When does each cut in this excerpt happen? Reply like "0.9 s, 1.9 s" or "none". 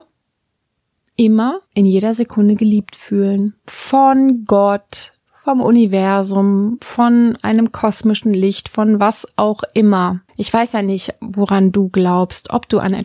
1.7 s, 3.6 s, 10.3 s